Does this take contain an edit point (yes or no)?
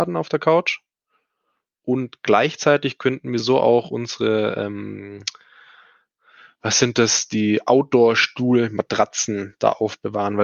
no